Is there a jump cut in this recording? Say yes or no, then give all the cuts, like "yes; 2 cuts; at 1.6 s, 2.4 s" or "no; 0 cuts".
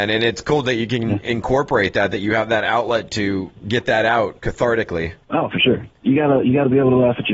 no; 0 cuts